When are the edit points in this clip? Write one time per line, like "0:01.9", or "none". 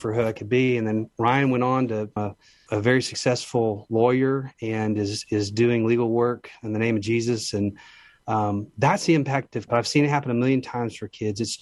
0:02.2
0:02.7
0:09.7